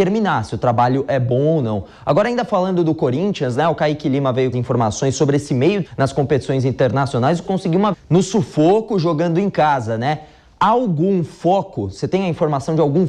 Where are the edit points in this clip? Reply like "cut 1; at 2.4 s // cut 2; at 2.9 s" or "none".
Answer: cut 1; at 4.5 s // cut 2; at 5.9 s // cut 3; at 7.4 s // cut 4; at 7.9 s